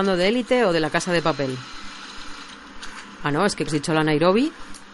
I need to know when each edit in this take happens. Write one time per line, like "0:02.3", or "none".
0:03.7